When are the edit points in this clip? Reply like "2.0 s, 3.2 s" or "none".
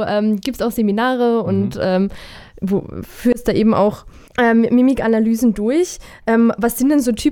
4.3 s